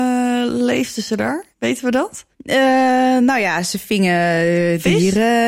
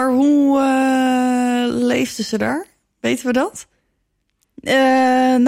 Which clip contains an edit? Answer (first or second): first